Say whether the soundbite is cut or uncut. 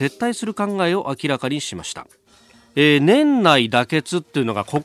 cut